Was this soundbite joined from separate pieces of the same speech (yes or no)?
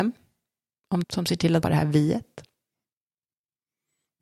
yes